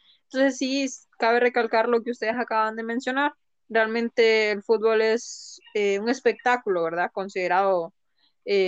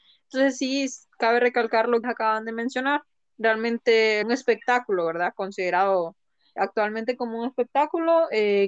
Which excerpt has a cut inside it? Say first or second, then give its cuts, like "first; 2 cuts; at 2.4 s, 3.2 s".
second; 3 cuts; at 2.0 s, 4.2 s, 6.6 s